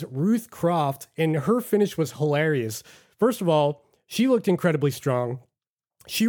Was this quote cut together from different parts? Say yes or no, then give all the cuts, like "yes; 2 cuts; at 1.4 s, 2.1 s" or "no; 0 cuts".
no; 0 cuts